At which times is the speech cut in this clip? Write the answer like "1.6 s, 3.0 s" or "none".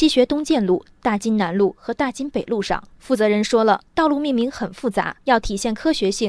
2.9 s, 3.9 s, 5.2 s